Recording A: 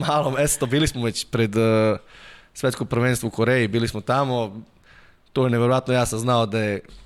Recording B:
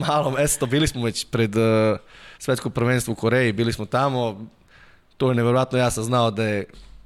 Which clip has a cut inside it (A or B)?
B